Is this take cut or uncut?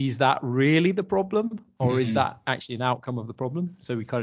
uncut